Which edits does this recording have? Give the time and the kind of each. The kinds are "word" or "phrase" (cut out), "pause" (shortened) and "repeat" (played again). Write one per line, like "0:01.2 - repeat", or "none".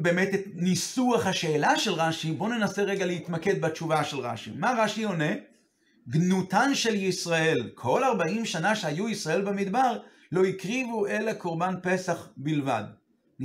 none